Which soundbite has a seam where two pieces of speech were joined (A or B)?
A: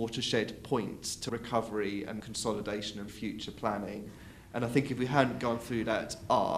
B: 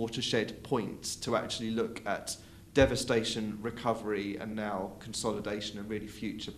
A